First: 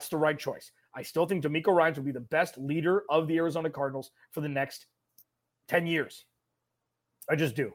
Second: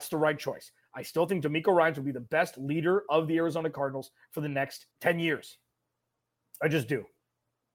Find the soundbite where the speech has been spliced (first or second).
second